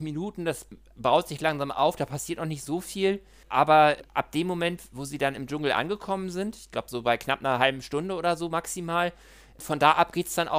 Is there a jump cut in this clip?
no; 0 cuts

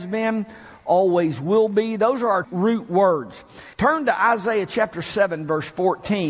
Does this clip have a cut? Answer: yes; 2 cuts; at 2.4 s, 3.7 s

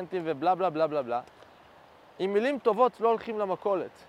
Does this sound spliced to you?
no; 0 cuts

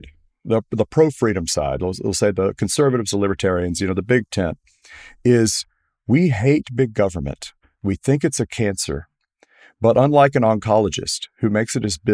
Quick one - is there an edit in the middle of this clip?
no; 0 cuts

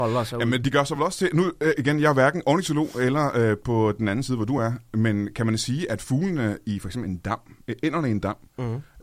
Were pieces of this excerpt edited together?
no; 0 cuts

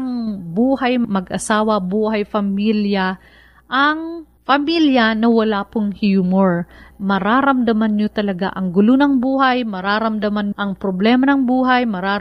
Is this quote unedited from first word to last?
no; 1 cut; at 10.5 s

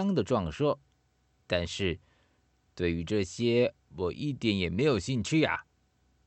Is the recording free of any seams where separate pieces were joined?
yes; 0 cuts

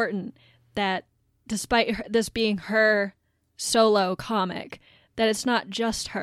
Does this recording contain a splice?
no; 0 cuts

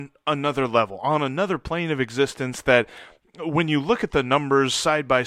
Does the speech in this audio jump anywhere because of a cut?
no; 0 cuts

